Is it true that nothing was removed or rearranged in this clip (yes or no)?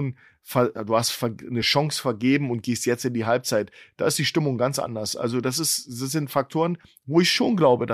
yes